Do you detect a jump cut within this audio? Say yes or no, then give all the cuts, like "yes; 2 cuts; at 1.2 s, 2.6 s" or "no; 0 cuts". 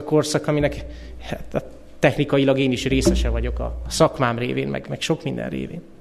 yes; 1 cut; at 4.8 s